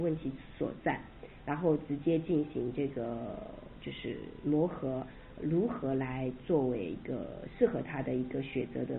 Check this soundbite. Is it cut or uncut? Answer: cut